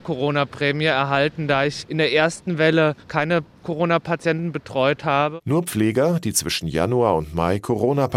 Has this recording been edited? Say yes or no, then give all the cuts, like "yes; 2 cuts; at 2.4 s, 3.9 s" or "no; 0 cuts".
yes; 1 cut; at 3.0 s